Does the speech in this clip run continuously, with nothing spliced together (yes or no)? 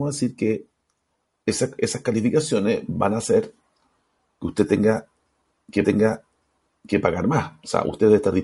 no